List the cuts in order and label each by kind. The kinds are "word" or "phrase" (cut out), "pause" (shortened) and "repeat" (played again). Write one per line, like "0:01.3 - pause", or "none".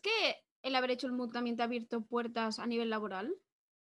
0:01.3 - word